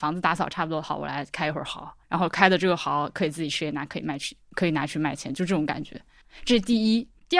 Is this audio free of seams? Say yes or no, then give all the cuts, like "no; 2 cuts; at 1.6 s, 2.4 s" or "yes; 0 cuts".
no; 1 cut; at 2.0 s